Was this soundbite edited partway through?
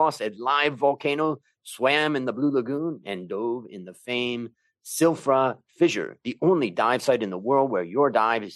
no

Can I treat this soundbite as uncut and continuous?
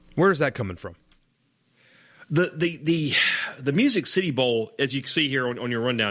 yes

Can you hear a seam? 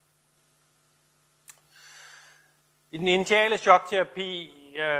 no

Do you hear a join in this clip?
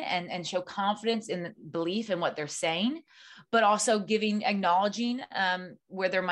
no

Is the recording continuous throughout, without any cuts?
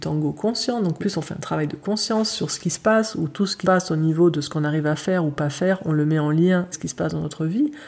no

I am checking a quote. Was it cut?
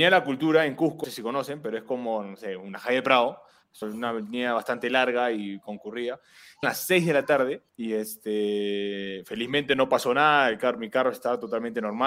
yes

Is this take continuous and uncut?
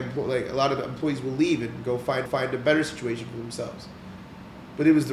no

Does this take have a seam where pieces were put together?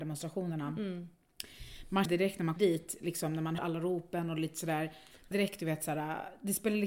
yes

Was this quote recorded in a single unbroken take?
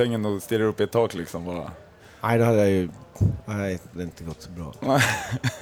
no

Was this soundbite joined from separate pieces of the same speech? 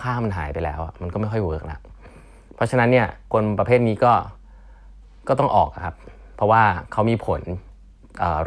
no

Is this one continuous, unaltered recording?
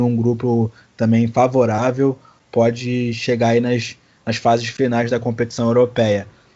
yes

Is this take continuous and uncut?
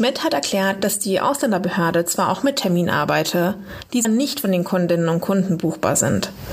no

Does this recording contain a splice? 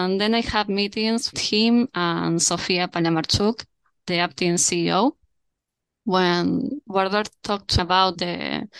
yes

